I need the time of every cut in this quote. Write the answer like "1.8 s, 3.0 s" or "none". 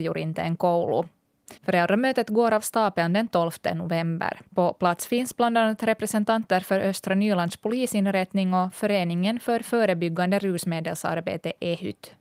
1.6 s, 4.5 s